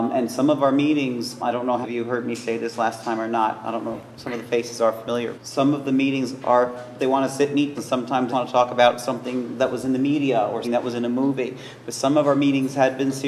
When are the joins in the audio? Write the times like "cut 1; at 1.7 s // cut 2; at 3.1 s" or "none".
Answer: cut 1; at 1.4 s // cut 2; at 1.8 s // cut 3; at 5.3 s // cut 4; at 7.0 s // cut 5; at 7.7 s // cut 6; at 8.3 s // cut 7; at 10.6 s